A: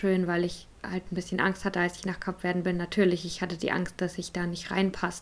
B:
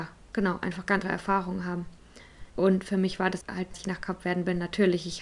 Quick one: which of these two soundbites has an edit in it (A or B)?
B